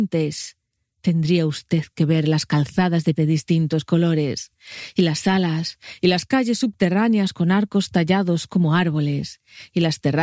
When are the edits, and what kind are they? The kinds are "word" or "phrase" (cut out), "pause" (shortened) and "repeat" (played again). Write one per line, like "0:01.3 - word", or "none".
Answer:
0:03.2 - word